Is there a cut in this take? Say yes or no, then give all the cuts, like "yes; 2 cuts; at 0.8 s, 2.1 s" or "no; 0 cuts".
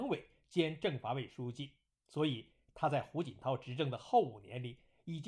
no; 0 cuts